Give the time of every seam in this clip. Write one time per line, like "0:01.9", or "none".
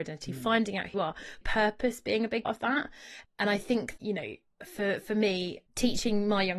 0:00.9
0:01.4
0:02.4
0:03.2
0:04.0
0:04.6
0:05.7